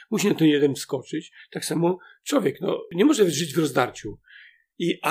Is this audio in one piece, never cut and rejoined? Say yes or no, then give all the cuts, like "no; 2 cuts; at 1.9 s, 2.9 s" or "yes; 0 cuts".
yes; 0 cuts